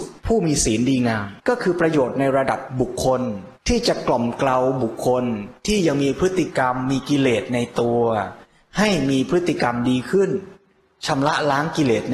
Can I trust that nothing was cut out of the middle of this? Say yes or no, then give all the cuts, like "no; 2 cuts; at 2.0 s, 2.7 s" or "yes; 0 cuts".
no; 2 cuts; at 1.4 s, 3.6 s